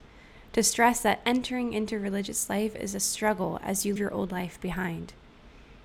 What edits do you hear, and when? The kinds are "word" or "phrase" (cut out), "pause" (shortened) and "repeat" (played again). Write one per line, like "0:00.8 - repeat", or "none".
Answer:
0:04.0 - word